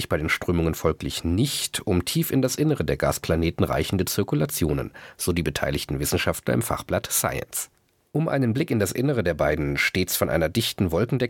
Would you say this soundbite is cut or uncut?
uncut